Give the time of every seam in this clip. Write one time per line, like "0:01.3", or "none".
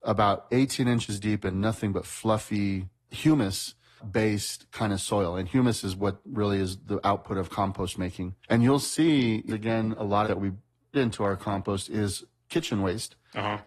0:03.0
0:08.4
0:09.5
0:10.2
0:10.9

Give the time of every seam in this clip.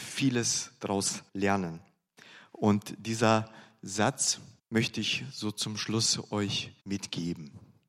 0:01.3
0:04.6
0:06.8

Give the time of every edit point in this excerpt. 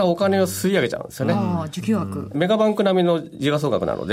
0:02.3

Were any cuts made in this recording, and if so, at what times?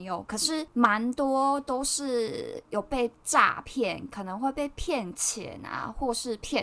none

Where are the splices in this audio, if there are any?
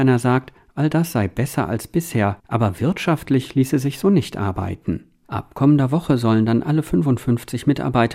0:02.4

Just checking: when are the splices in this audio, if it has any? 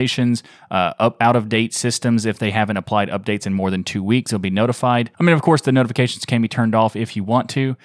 0:05.1

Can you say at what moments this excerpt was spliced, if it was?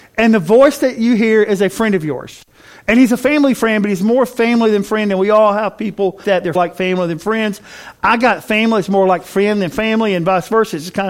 0:06.2
0:06.6

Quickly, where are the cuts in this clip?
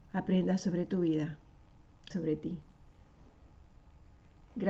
0:02.1

